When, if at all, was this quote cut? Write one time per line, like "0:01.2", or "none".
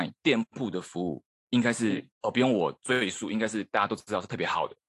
0:01.3
0:02.1